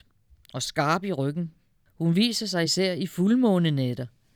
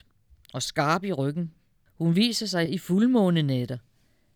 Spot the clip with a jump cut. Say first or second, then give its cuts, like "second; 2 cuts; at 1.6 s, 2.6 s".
second; 1 cut; at 2.7 s